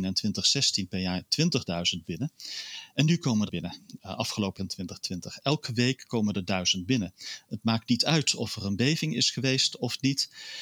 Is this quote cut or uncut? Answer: cut